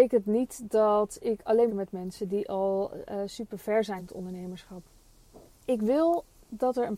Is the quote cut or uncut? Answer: cut